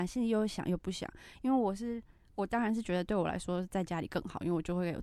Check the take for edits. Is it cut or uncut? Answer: uncut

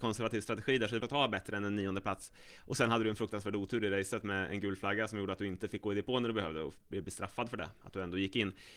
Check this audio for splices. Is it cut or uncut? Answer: cut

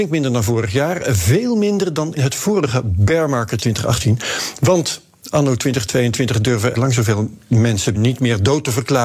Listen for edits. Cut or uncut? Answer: cut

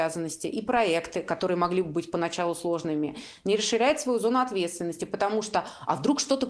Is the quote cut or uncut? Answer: uncut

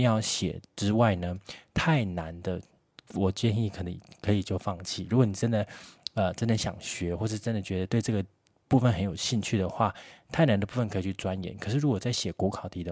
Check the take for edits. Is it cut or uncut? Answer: uncut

